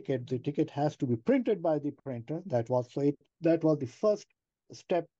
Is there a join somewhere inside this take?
yes; 1 cut; at 3.3 s

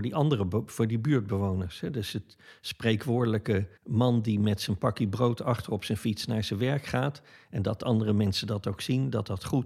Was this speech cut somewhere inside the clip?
yes; 1 cut; at 3.8 s

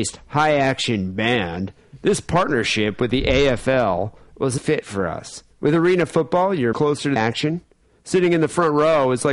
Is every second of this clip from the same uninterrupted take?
no; 3 cuts; at 4.6 s, 6.7 s, 7.2 s

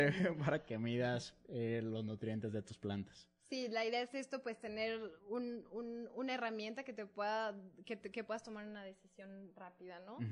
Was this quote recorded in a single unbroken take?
yes; 0 cuts

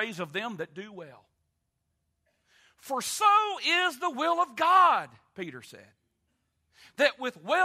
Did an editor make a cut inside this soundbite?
no; 0 cuts

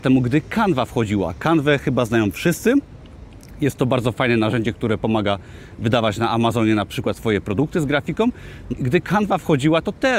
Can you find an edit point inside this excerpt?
yes; 1 cut; at 8.7 s

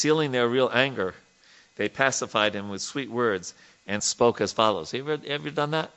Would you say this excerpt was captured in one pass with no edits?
no; 1 cut; at 4.0 s

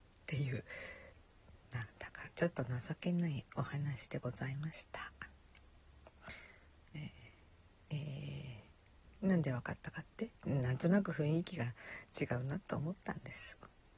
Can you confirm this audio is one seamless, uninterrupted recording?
no; 1 cut; at 10.4 s

